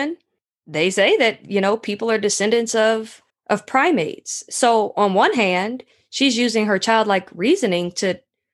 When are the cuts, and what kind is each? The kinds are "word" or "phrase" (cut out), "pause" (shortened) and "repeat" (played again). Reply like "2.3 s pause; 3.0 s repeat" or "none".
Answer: 3.3 s pause